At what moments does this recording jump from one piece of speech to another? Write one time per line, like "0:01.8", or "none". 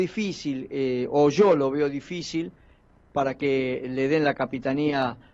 none